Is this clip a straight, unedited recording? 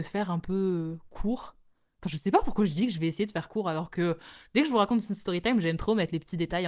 yes; 0 cuts

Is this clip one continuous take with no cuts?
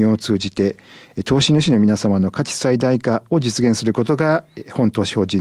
yes; 0 cuts

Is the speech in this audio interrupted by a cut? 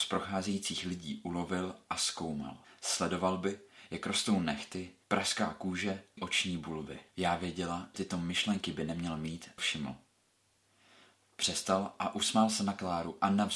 yes; 6 cuts; at 2.6 s, 5.0 s, 6.2 s, 7.1 s, 7.9 s, 9.6 s

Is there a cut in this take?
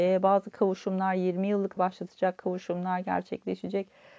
yes; 1 cut; at 1.8 s

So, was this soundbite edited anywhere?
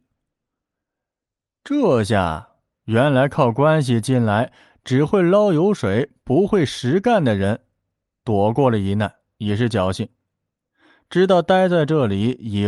no; 0 cuts

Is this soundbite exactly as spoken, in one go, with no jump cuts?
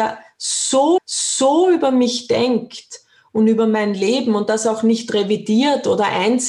no; 1 cut; at 1.0 s

